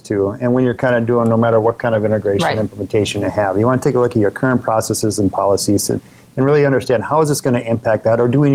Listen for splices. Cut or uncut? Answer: uncut